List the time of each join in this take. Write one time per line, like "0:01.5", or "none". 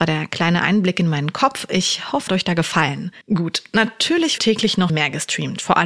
0:02.3
0:03.2
0:04.4
0:04.9